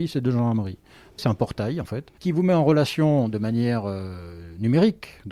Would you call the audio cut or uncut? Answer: cut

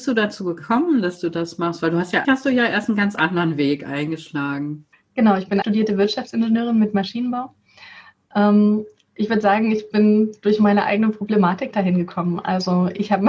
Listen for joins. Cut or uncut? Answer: cut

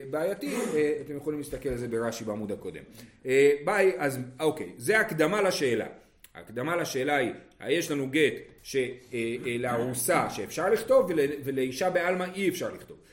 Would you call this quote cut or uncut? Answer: uncut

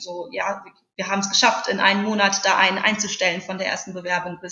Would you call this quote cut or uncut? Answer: uncut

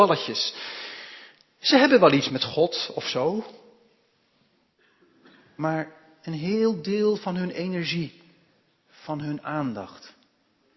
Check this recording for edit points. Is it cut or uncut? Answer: cut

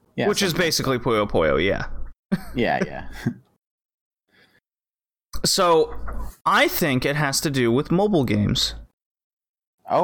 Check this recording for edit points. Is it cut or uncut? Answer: uncut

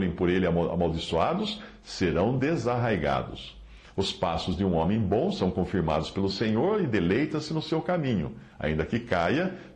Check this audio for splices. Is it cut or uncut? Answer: uncut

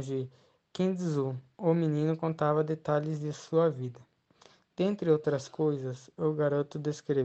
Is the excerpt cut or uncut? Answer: uncut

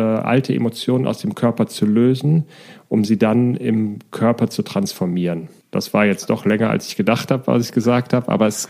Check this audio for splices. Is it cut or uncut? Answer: uncut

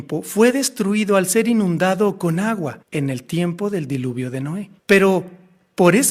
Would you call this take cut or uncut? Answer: cut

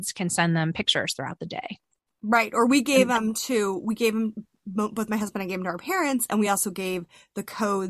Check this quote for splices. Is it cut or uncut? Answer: uncut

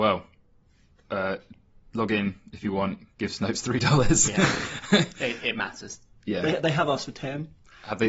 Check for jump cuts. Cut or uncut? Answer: uncut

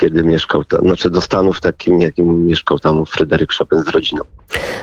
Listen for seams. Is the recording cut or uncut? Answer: uncut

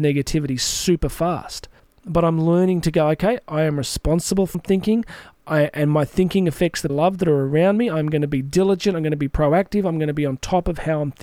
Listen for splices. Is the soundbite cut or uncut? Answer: cut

